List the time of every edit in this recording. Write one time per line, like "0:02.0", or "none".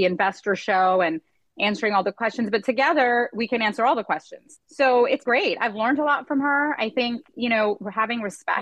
0:05.3